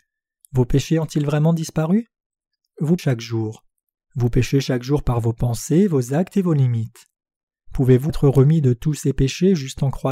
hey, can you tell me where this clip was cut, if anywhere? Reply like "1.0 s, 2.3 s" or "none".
3.0 s, 8.1 s